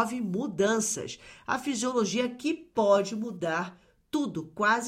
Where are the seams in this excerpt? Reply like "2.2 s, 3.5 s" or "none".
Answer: none